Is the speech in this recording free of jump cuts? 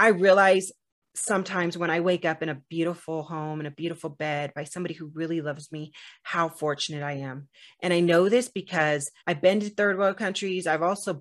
no; 1 cut; at 9.2 s

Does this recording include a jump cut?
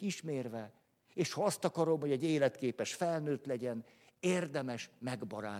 no; 0 cuts

